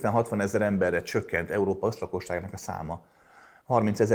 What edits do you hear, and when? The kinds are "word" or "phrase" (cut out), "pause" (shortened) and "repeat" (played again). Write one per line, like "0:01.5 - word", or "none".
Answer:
none